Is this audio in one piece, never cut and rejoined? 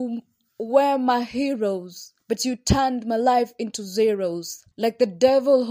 no; 2 cuts; at 2.2 s, 4.7 s

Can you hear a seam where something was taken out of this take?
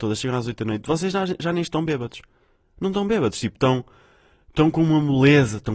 no; 0 cuts

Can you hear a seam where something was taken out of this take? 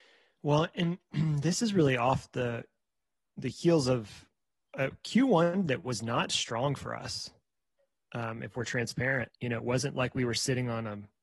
no; 0 cuts

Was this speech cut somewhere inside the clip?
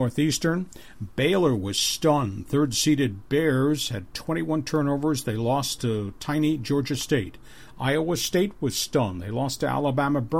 no; 0 cuts

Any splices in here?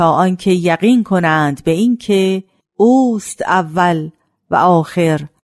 no; 0 cuts

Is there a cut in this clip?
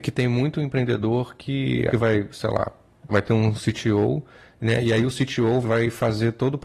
yes; 3 cuts; at 1.9 s, 3.1 s, 5.6 s

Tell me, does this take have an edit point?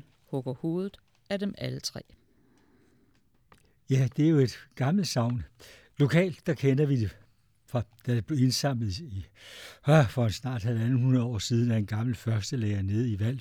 no; 0 cuts

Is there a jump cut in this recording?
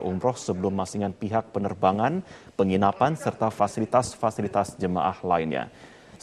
yes; 1 cut; at 0.9 s

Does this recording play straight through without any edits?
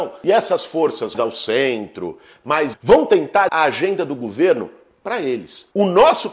no; 3 cuts; at 1.1 s, 2.7 s, 3.5 s

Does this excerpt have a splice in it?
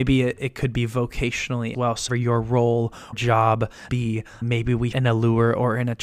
yes; 6 cuts; at 1.7 s, 2.1 s, 3.1 s, 3.9 s, 4.4 s, 4.9 s

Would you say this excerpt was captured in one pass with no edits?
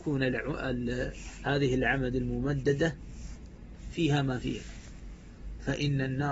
yes; 0 cuts

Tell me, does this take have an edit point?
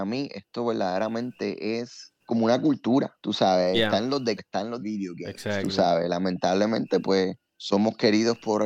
yes; 5 cuts; at 2.2 s, 3.2 s, 4.4 s, 4.8 s, 7.5 s

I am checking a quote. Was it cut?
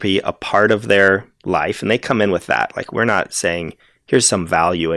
no; 0 cuts

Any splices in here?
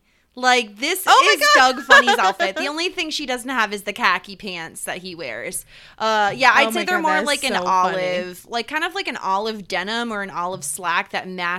no; 0 cuts

